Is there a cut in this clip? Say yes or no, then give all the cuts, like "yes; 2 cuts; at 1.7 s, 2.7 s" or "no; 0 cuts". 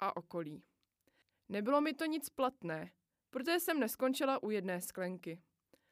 no; 0 cuts